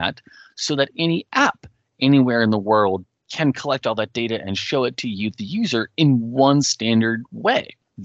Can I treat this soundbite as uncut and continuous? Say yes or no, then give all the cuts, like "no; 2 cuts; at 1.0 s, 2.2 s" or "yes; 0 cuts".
yes; 0 cuts